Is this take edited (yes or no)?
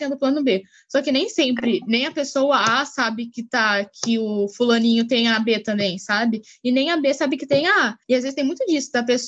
yes